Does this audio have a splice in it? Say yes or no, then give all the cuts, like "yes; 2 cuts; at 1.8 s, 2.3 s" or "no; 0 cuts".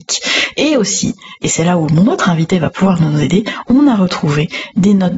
no; 0 cuts